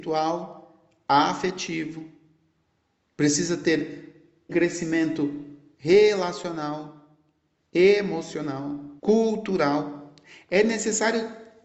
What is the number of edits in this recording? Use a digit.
2